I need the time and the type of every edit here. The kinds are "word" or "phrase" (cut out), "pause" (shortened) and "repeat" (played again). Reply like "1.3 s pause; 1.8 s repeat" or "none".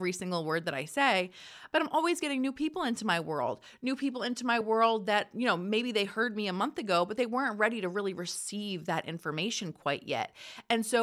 none